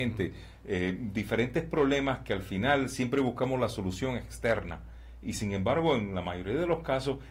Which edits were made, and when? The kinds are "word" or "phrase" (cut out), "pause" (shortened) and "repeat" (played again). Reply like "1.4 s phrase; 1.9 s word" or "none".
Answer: none